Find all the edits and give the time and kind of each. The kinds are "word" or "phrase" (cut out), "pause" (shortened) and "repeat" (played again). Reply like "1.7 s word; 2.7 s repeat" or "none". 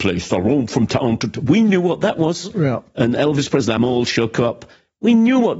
none